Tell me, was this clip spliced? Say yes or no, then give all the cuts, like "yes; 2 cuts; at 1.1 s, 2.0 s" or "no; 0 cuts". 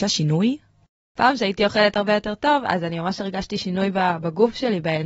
no; 0 cuts